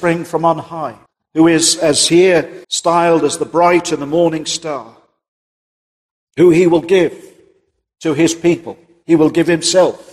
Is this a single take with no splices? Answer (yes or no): no